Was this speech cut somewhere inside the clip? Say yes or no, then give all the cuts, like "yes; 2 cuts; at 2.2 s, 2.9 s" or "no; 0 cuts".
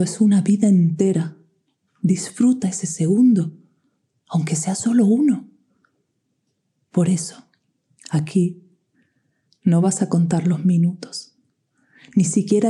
no; 0 cuts